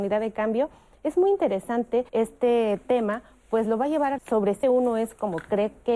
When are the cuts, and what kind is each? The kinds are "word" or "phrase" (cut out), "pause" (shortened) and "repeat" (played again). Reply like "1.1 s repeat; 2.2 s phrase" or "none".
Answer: 2.1 s pause; 4.2 s word; 4.6 s word